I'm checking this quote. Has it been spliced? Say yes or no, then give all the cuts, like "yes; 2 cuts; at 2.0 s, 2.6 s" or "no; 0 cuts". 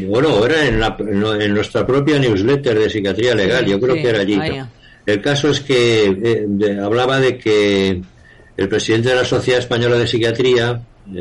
yes; 1 cut; at 4.5 s